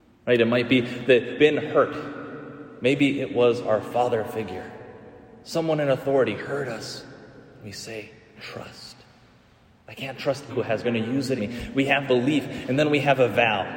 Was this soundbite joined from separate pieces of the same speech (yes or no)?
yes